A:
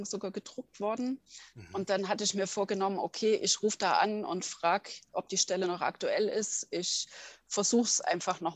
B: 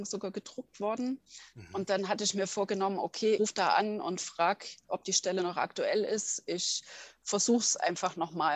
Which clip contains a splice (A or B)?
B